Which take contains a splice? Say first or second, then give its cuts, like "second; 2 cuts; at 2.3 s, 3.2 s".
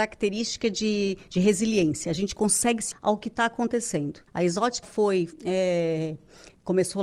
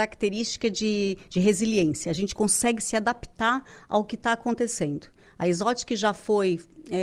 first; 4 cuts; at 2.9 s, 4.3 s, 4.8 s, 5.3 s